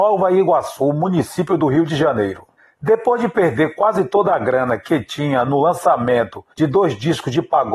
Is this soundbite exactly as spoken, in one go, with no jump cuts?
no; 2 cuts; at 2.6 s, 6.5 s

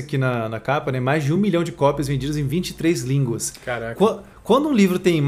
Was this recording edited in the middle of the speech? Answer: no; 0 cuts

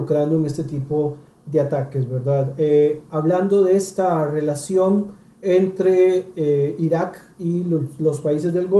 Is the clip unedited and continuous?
yes; 0 cuts

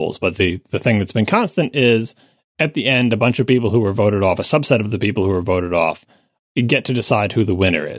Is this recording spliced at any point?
no; 0 cuts

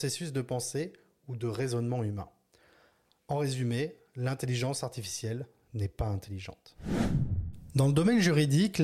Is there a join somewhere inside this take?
no; 0 cuts

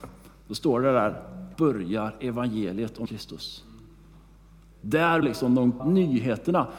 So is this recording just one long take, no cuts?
no; 4 cuts; at 1.5 s, 3.1 s, 5.2 s, 5.8 s

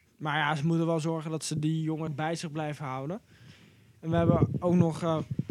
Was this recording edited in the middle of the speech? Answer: yes; 1 cut; at 2.1 s

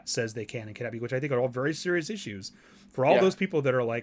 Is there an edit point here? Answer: no; 0 cuts

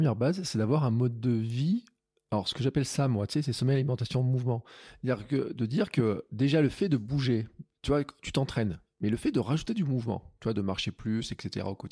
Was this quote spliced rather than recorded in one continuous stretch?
no; 0 cuts

